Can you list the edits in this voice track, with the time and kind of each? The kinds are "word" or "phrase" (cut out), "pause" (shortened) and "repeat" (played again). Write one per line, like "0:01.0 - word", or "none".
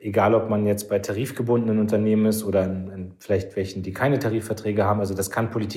none